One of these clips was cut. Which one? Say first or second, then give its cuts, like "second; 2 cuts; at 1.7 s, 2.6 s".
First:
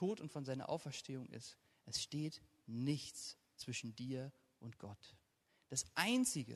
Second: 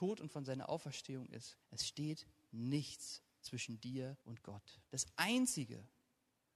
second; 3 cuts; at 1.6 s, 4.2 s, 4.9 s